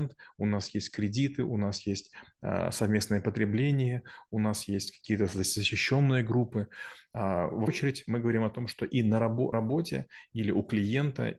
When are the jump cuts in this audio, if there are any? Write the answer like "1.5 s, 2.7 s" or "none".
7.7 s, 9.5 s